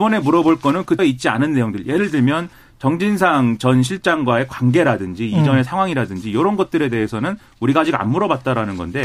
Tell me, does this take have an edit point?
yes; 1 cut; at 1.0 s

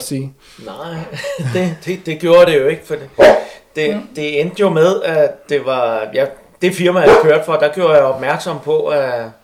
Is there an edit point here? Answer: no; 0 cuts

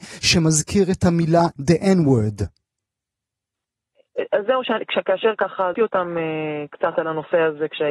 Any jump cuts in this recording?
yes; 2 cuts; at 1.6 s, 5.7 s

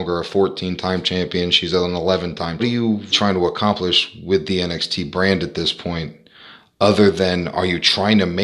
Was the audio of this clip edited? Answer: yes; 2 cuts; at 2.6 s, 3.1 s

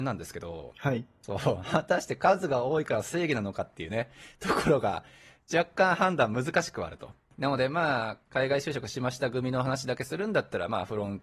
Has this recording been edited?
no; 0 cuts

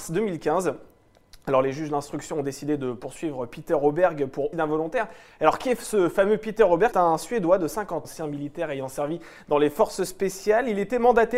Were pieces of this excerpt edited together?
yes; 3 cuts; at 4.5 s, 6.9 s, 8.0 s

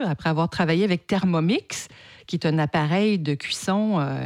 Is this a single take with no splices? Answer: yes; 0 cuts

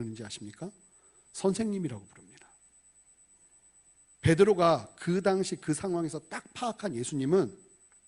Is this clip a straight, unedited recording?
yes; 0 cuts

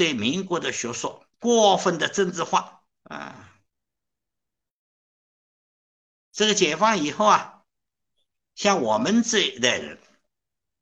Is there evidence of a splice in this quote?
yes; 2 cuts; at 1.3 s, 3.0 s

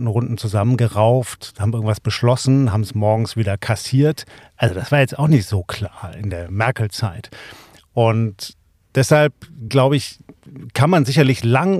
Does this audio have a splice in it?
no; 0 cuts

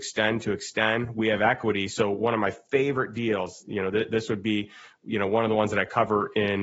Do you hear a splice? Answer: no; 0 cuts

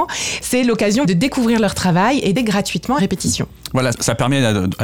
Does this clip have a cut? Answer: yes; 4 cuts; at 1.0 s, 2.4 s, 3.0 s, 3.9 s

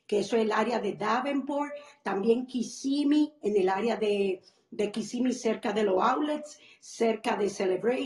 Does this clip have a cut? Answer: no; 0 cuts

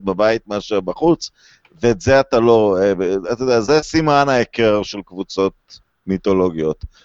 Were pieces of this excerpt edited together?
no; 0 cuts

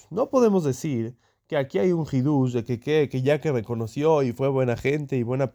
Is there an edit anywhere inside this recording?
no; 0 cuts

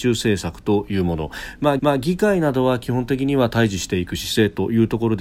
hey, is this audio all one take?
no; 1 cut; at 1.8 s

